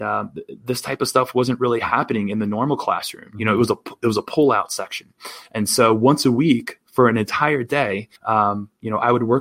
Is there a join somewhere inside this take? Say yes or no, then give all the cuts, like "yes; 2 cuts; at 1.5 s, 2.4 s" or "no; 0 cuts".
yes; 1 cut; at 8.2 s